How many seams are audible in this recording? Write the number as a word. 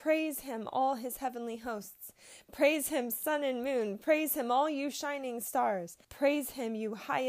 one